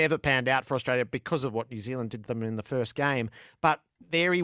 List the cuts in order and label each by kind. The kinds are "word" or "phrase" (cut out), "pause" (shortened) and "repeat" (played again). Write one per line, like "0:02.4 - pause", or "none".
none